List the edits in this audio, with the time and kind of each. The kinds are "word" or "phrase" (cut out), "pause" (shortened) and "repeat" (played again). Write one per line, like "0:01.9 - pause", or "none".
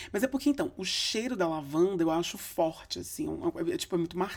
none